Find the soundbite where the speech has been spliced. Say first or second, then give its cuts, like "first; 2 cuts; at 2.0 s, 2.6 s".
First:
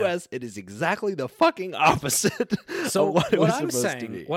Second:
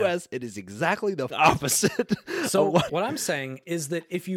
second; 2 cuts; at 1.3 s, 2.9 s